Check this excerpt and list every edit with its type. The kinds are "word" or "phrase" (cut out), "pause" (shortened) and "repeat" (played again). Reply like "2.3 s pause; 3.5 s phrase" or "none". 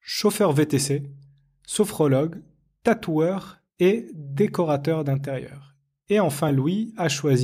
none

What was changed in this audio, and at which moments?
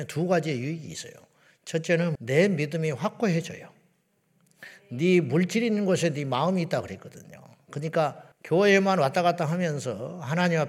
2.2 s word; 8.3 s pause

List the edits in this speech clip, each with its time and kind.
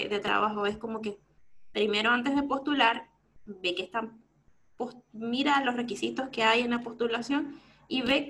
none

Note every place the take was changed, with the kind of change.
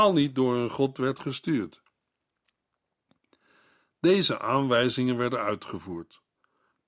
none

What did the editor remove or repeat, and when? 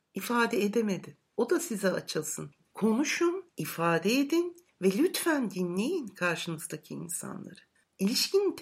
3.5 s pause

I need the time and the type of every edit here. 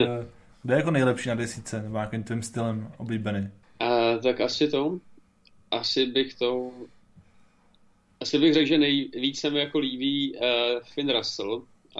3.6 s pause

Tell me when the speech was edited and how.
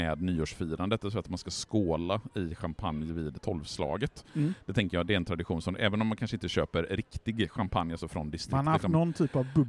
none

